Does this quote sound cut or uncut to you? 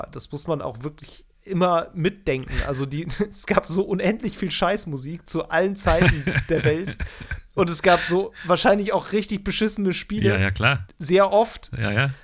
cut